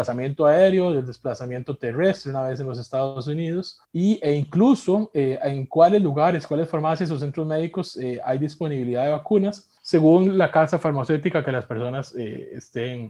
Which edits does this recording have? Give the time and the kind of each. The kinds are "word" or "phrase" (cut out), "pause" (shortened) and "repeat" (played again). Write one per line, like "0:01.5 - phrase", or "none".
0:03.8 - pause
0:09.8 - pause